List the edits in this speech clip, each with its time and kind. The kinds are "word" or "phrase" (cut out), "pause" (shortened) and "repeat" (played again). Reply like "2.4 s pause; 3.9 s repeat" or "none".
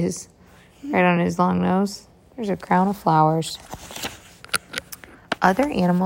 none